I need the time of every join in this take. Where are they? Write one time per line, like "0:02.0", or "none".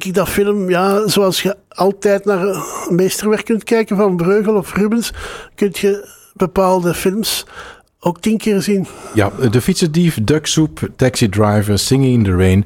none